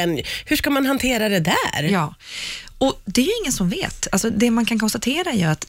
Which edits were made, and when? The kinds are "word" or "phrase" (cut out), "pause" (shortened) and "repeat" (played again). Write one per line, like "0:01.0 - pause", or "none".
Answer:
none